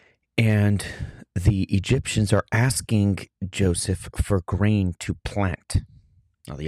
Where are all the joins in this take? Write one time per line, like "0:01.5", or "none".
none